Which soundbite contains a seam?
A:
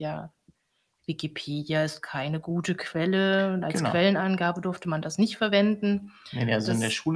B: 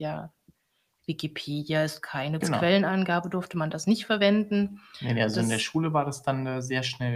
B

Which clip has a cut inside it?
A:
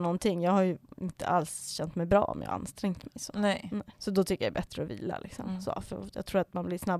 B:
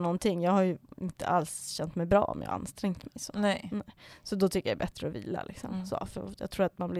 A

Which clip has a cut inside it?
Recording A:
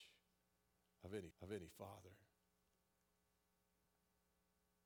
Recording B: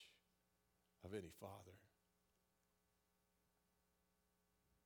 A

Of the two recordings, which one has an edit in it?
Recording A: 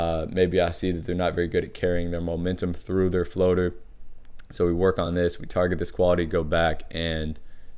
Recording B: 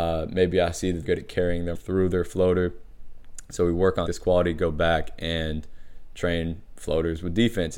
B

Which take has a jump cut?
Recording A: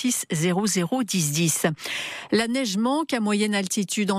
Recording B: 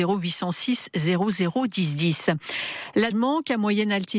B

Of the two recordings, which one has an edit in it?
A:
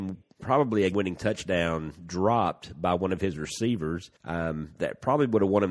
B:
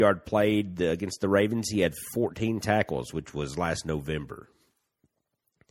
A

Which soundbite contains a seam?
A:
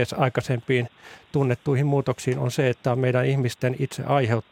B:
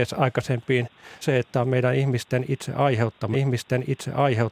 B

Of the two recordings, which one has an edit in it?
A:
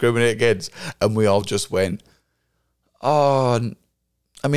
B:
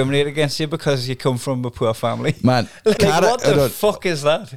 B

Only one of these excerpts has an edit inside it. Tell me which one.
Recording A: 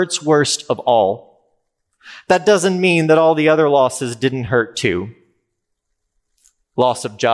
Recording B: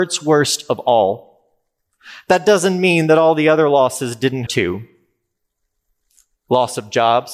B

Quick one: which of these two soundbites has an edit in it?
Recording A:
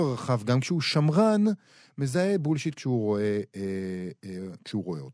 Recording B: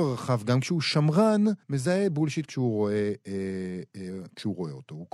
B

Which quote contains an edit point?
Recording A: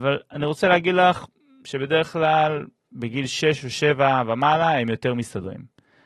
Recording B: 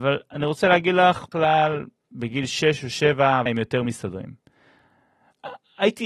B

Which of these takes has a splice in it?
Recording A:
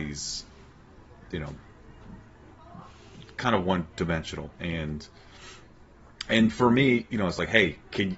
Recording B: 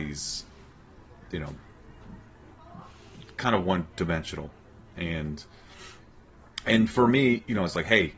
A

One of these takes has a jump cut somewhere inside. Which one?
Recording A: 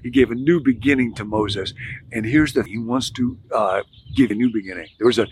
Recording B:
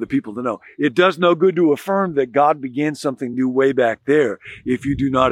A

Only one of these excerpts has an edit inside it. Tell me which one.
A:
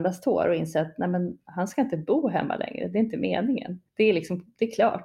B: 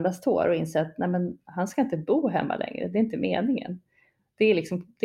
A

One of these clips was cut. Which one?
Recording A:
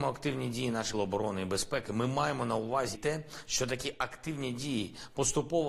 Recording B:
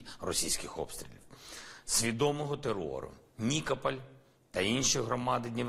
A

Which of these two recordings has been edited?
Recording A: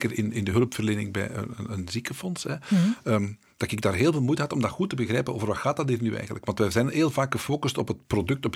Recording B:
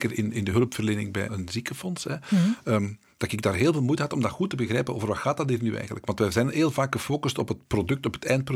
B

